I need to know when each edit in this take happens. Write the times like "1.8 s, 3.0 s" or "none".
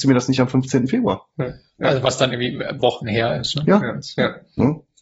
2.8 s